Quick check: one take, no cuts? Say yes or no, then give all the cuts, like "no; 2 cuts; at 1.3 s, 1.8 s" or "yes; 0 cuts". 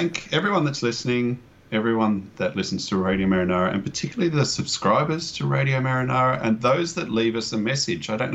yes; 0 cuts